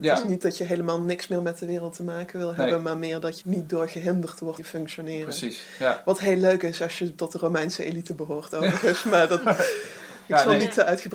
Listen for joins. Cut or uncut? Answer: cut